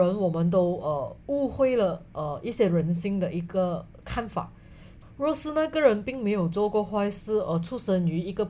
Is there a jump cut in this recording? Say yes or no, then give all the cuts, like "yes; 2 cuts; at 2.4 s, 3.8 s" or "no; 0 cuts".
no; 0 cuts